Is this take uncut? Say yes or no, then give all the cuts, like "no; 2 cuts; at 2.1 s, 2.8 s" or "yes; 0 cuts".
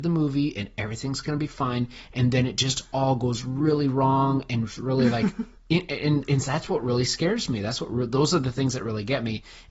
yes; 0 cuts